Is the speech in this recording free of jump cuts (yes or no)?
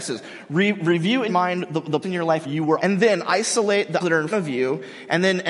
no